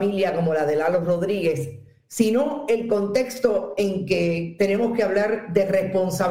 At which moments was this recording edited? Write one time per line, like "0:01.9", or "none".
none

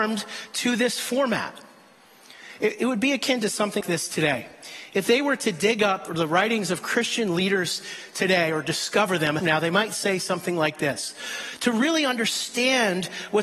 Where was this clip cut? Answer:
0:03.8
0:06.1
0:09.4

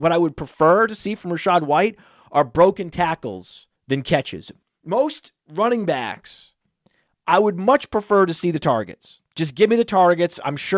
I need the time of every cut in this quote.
0:03.8
0:05.4
0:09.3

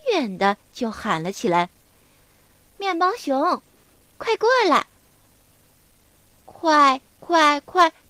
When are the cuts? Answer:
none

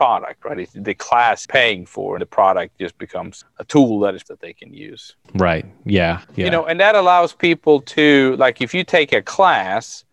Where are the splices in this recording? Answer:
0:01.4
0:02.2
0:03.4
0:04.2
0:05.2
0:06.2

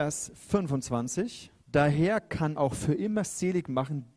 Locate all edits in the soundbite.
0:01.6
0:02.6

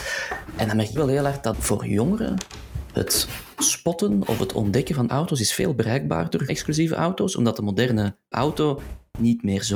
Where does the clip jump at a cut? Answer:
0:01.0
0:01.5
0:05.1
0:06.5
0:08.3

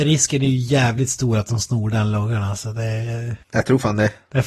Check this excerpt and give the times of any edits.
0:03.4

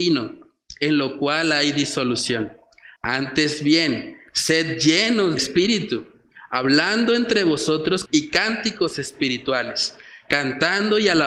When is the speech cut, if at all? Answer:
0:03.0
0:05.4
0:08.1

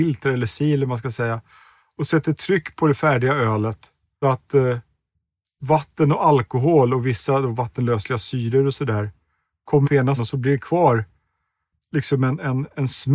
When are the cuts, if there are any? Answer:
0:04.2
0:09.8
0:10.2

